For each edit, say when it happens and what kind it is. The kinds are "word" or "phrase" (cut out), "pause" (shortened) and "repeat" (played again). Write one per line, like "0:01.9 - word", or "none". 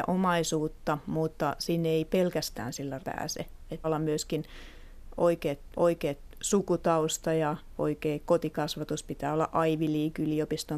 0:03.0 - word
0:03.8 - word
0:05.7 - repeat